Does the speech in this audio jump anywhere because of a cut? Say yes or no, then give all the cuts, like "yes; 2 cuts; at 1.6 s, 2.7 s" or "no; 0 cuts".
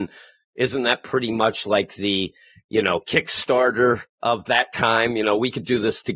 no; 0 cuts